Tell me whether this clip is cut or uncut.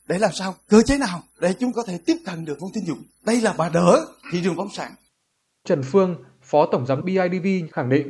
cut